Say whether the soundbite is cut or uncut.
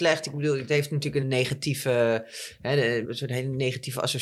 cut